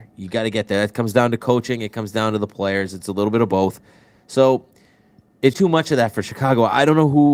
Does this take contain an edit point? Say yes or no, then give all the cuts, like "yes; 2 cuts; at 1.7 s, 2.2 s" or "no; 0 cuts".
yes; 1 cut; at 5.5 s